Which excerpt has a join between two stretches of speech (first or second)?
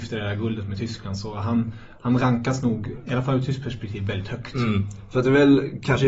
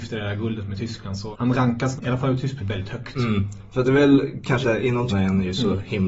second